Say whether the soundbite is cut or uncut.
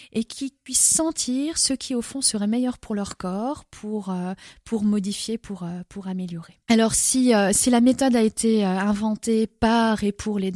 uncut